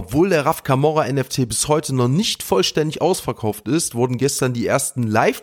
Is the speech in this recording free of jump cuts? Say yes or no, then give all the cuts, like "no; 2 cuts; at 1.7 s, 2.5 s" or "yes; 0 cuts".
yes; 0 cuts